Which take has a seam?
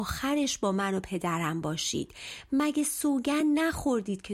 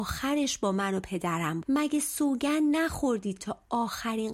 second; 2 cuts; at 1.6 s, 3.4 s

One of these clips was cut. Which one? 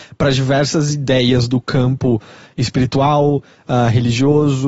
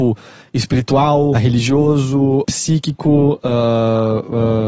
second; 2 cuts; at 1.3 s, 2.4 s

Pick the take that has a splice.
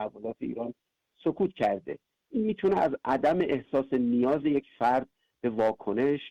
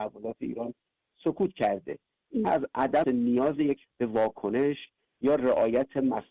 second; 3 cuts; at 2.4 s, 3.0 s, 3.8 s

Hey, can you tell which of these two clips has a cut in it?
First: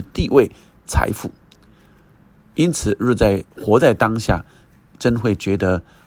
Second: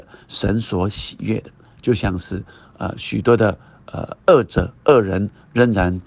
first; 1 cut; at 3.5 s

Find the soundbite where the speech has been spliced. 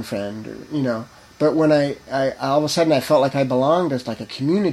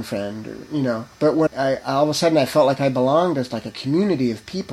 second; 2 cuts; at 1.1 s, 1.5 s

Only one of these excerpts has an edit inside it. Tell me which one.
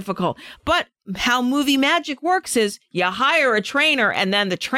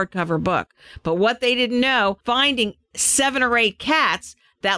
second; 1 cut; at 2.2 s

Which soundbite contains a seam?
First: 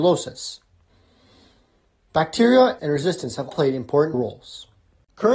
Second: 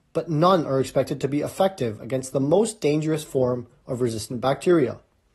first; 3 cuts; at 2.8 s, 3.5 s, 4.1 s

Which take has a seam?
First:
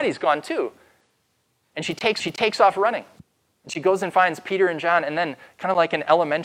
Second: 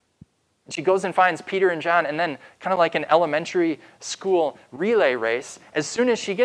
first; 2 cuts; at 2.2 s, 3.2 s

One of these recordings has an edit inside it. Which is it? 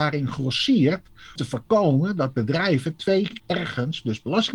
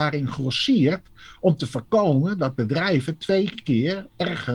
first; 2 cuts; at 1.4 s, 3.4 s

